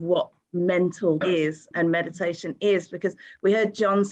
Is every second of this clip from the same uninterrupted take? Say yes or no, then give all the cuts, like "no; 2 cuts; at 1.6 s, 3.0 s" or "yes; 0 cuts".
no; 2 cuts; at 1.2 s, 1.7 s